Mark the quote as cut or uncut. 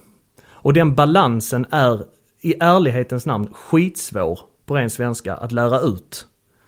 uncut